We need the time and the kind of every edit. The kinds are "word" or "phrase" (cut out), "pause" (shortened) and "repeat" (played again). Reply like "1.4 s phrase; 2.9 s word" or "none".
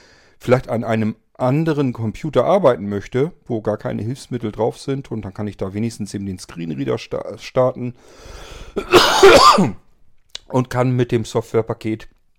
none